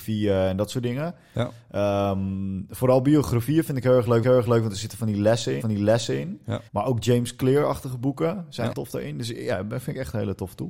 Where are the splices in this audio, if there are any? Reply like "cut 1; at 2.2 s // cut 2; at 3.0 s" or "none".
cut 1; at 4.2 s // cut 2; at 5.6 s // cut 3; at 6.7 s // cut 4; at 8.7 s